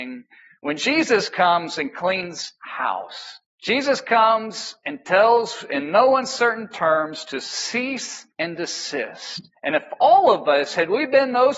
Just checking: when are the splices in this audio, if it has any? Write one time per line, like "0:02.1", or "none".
0:03.4
0:08.3
0:09.6